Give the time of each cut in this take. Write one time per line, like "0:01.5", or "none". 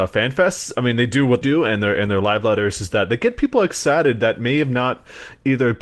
0:01.4